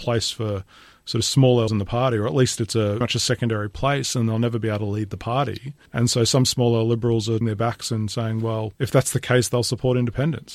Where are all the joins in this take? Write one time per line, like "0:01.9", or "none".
0:01.7
0:03.0
0:05.9
0:07.4
0:08.7